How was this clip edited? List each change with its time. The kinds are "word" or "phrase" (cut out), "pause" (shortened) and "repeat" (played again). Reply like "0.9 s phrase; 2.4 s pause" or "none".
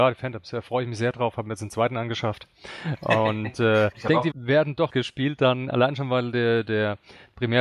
3.9 s word; 4.3 s word; 4.9 s word